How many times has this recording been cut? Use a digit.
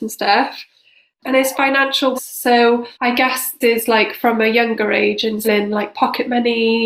5